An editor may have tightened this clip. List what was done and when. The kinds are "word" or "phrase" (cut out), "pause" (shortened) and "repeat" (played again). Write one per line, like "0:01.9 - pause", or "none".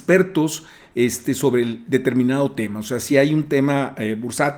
none